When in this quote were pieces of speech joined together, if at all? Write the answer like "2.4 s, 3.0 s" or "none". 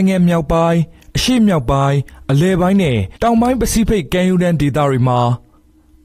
3.2 s